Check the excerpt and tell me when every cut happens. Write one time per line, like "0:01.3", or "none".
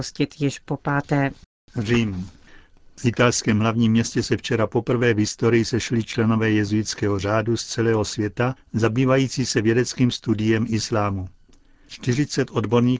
0:08.6